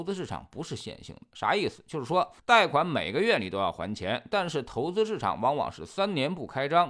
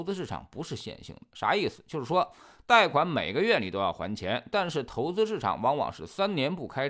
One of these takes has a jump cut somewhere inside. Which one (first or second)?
first